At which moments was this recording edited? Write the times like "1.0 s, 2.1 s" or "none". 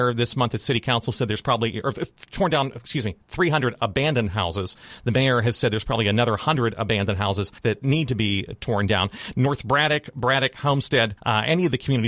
3.2 s, 7.6 s, 11.2 s